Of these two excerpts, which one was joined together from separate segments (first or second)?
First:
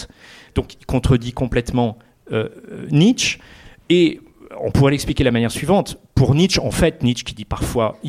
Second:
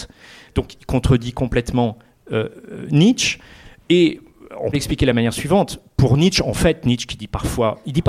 second